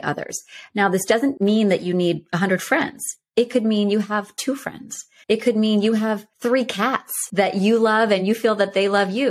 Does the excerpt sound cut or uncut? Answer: uncut